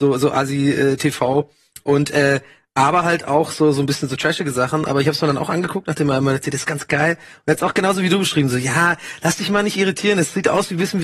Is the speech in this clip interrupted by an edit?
no; 0 cuts

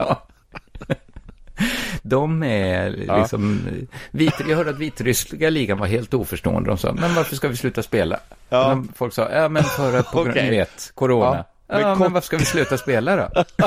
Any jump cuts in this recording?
no; 0 cuts

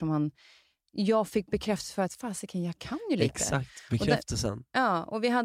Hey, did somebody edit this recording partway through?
no; 0 cuts

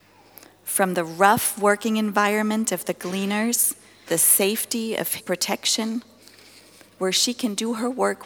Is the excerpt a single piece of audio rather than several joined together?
no; 2 cuts; at 4.1 s, 5.2 s

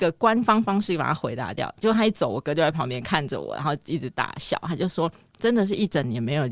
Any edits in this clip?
no; 0 cuts

